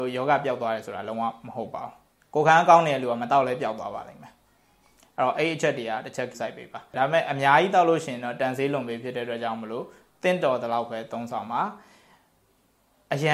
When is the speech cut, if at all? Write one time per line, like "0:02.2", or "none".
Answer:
0:06.3